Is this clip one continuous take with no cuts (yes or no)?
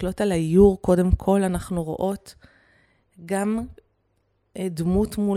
yes